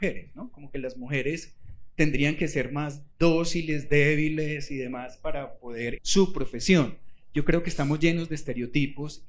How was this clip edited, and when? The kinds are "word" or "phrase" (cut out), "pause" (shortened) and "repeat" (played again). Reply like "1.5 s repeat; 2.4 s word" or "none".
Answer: 1.9 s pause; 3.1 s pause; 6.0 s word